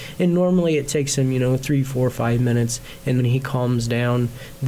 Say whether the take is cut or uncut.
cut